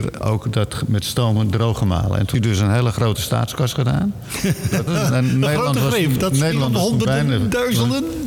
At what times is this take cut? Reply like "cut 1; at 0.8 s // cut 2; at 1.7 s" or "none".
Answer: cut 1; at 2.3 s // cut 2; at 3.2 s // cut 3; at 4.9 s